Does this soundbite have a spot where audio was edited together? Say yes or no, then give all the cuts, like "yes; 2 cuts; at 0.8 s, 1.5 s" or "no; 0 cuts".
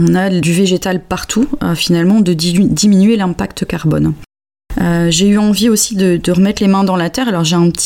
no; 0 cuts